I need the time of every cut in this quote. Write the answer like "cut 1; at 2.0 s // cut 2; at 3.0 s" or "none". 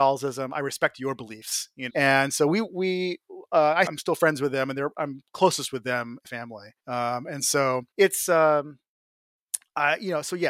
cut 1; at 1.9 s // cut 2; at 3.9 s // cut 3; at 6.2 s // cut 4; at 6.8 s // cut 5; at 7.9 s